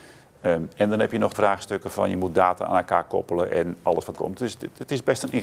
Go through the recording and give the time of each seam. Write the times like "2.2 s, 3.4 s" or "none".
1.3 s, 4.1 s